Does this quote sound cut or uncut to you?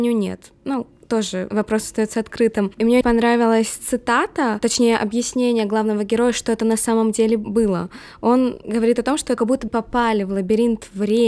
cut